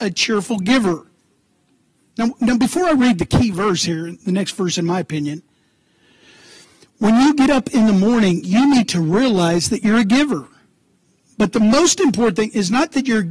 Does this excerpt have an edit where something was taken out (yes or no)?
no